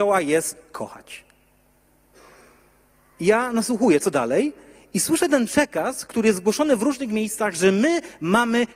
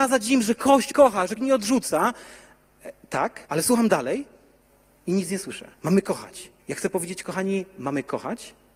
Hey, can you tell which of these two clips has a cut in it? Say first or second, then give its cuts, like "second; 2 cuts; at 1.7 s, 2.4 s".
second; 6 cuts; at 0.9 s, 1.4 s, 3.5 s, 4.6 s, 5.7 s, 6.6 s